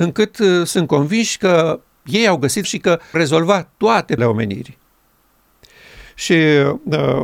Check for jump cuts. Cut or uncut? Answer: cut